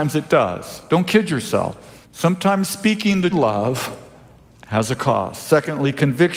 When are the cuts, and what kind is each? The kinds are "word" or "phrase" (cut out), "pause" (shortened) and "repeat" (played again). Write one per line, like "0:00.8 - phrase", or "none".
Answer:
0:02.0 - pause
0:03.3 - phrase